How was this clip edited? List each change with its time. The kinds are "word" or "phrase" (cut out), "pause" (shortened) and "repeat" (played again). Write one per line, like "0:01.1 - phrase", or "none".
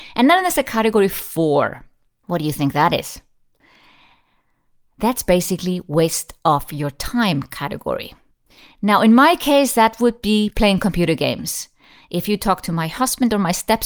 none